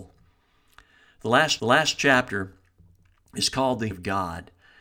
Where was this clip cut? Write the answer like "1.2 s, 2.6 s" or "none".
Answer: 1.6 s, 3.9 s